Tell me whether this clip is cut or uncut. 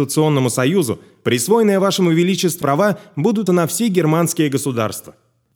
cut